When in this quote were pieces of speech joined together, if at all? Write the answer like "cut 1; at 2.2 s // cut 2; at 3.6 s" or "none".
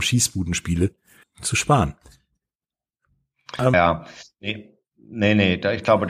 cut 1; at 1.2 s // cut 2; at 3.7 s